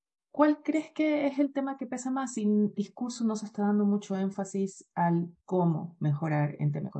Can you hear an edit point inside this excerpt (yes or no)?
yes